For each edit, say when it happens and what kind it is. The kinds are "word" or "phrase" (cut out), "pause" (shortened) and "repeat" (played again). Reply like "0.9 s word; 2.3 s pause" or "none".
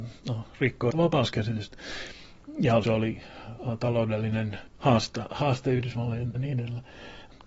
0.9 s word; 2.8 s phrase; 4.7 s pause; 6.3 s word